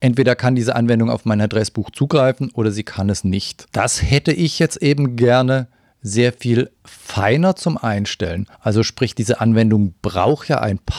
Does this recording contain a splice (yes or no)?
yes